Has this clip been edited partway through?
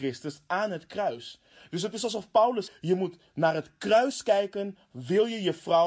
yes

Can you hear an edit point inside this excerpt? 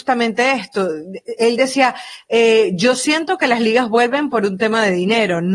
no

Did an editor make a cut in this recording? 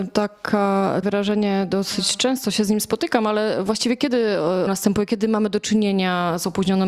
yes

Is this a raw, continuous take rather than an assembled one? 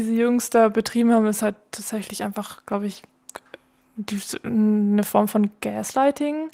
yes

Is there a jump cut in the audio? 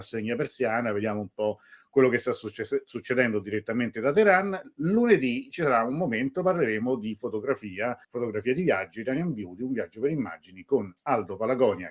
yes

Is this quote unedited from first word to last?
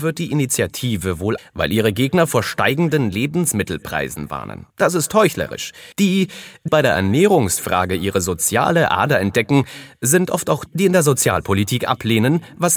no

